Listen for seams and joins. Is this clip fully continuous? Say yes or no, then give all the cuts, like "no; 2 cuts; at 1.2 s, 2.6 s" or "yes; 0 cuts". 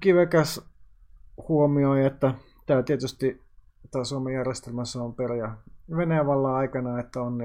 yes; 0 cuts